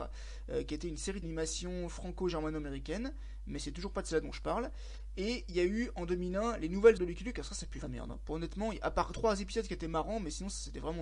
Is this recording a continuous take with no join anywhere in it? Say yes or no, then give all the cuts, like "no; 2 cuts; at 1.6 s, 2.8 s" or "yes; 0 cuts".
no; 4 cuts; at 1.2 s, 7.0 s, 7.8 s, 9.1 s